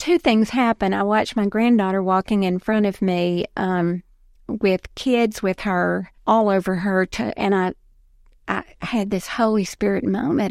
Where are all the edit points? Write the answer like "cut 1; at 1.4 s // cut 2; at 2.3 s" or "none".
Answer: cut 1; at 6.2 s